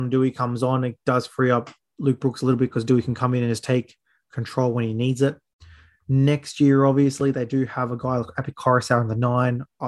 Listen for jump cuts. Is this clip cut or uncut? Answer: uncut